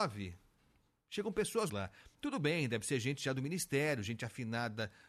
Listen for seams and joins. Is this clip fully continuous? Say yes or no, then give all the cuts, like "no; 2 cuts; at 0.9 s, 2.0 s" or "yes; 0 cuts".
no; 1 cut; at 1.7 s